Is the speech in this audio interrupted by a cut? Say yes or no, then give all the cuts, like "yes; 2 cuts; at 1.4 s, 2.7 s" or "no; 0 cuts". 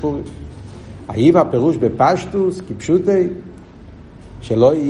no; 0 cuts